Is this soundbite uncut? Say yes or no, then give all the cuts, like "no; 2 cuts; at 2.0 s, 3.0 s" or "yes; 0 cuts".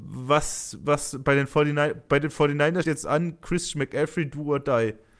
no; 1 cut; at 2.8 s